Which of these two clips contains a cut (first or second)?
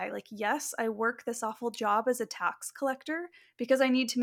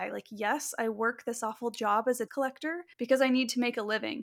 second